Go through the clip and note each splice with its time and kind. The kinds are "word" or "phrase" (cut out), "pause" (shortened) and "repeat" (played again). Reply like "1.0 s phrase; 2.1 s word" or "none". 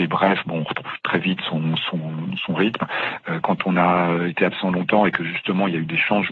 none